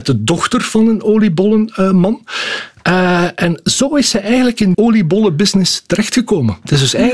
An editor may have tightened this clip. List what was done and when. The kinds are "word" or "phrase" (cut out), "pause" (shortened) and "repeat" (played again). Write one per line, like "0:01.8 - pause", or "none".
0:04.7 - word